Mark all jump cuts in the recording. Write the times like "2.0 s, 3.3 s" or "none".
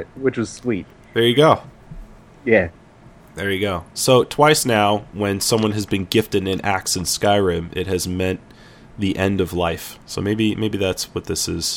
none